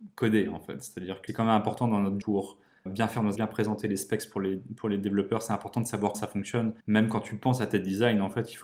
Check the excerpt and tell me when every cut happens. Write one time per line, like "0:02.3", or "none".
0:01.3
0:02.2
0:02.9
0:03.4
0:06.1
0:06.8